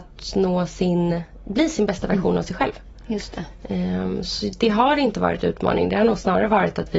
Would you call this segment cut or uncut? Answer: uncut